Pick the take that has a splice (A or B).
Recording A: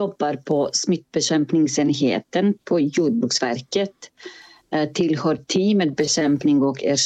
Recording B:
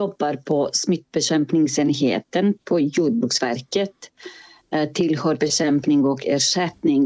B